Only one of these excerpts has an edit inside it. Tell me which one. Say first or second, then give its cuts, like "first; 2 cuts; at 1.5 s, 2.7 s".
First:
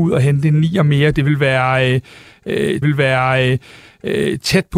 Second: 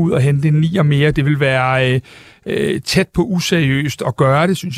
first; 1 cut; at 2.8 s